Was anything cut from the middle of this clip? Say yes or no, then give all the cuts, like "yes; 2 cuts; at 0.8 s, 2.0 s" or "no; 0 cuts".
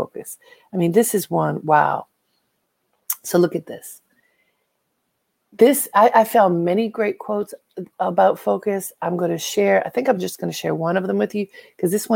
no; 0 cuts